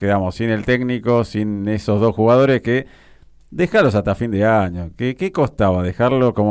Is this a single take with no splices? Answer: yes; 0 cuts

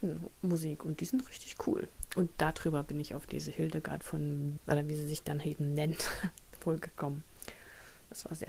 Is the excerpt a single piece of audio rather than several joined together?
no; 1 cut; at 4.6 s

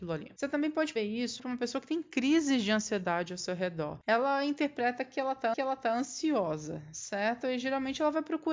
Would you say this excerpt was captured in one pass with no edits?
no; 3 cuts; at 1.0 s, 1.4 s, 5.5 s

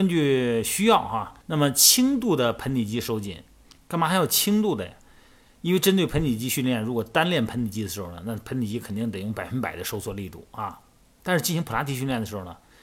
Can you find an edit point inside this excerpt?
yes; 1 cut; at 1.4 s

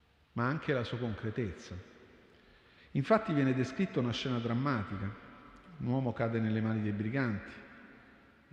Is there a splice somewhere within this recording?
no; 0 cuts

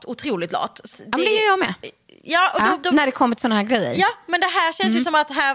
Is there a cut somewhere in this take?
yes; 2 cuts; at 0.9 s, 2.8 s

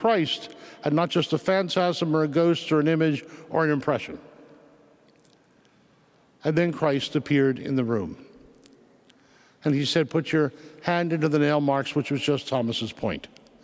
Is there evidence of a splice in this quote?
no; 0 cuts

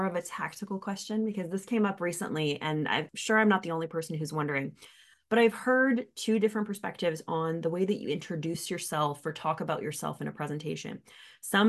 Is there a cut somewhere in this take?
no; 0 cuts

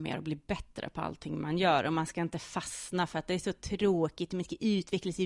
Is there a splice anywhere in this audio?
no; 0 cuts

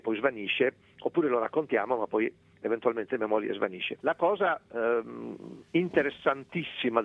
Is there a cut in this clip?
yes; 1 cut; at 4.0 s

